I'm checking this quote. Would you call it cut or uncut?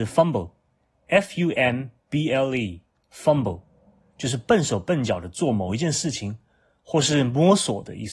uncut